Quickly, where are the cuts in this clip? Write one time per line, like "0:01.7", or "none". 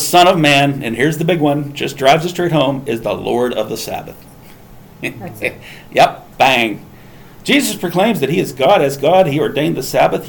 0:06.3

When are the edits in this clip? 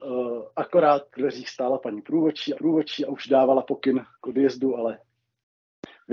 0:01.2
0:02.5
0:04.1

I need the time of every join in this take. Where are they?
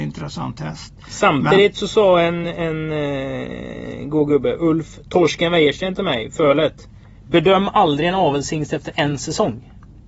none

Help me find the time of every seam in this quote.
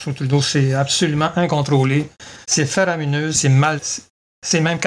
0:02.4
0:03.3
0:03.8

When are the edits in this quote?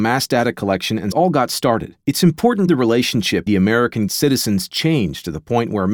0:01.1
0:02.0
0:02.7
0:03.5
0:04.1

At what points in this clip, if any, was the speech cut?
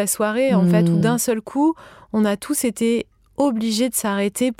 none

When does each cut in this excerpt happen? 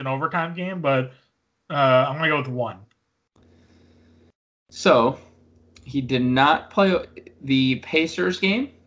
none

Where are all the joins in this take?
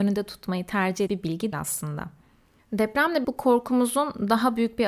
0:01.1
0:01.5
0:03.2

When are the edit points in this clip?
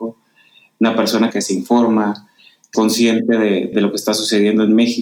0:01.3
0:02.7
0:03.7

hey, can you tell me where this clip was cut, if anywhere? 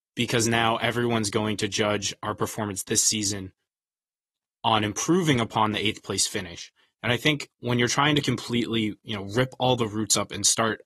none

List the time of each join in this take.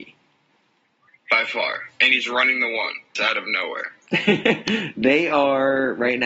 0:03.1

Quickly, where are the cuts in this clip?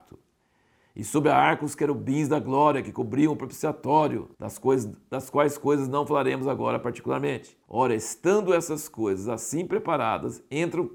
0:04.3
0:07.6

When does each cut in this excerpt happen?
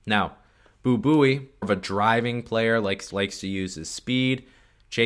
0:01.6
0:03.1

